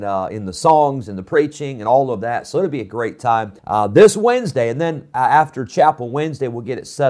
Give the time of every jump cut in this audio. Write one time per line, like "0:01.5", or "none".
0:03.6